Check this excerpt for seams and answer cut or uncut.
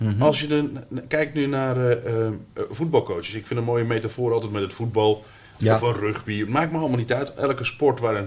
uncut